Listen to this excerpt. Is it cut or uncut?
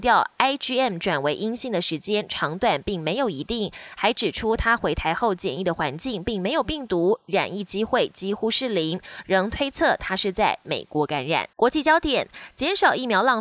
cut